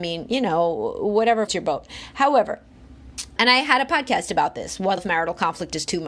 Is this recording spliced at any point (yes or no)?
yes